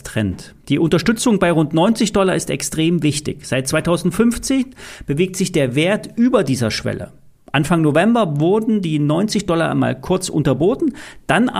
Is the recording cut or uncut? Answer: uncut